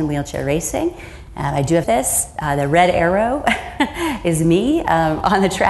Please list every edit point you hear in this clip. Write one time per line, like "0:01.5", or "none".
0:01.8